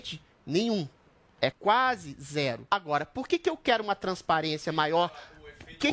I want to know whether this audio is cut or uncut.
cut